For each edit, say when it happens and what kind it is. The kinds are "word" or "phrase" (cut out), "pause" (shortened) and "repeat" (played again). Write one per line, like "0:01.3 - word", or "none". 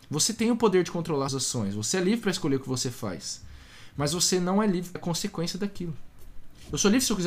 0:01.3 - word
0:05.0 - phrase